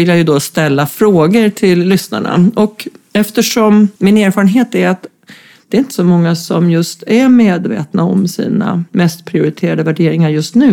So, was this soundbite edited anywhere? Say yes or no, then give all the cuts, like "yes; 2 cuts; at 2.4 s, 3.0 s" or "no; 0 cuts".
yes; 1 cut; at 4.0 s